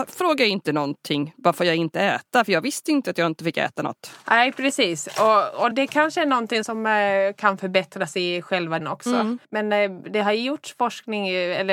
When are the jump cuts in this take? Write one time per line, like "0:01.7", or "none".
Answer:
0:05.7
0:08.8
0:09.4